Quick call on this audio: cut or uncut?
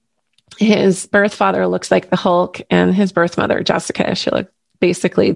uncut